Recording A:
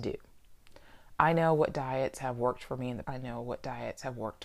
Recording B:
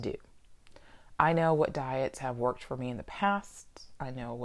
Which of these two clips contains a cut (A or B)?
A